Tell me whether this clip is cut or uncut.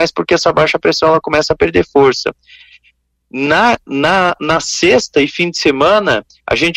uncut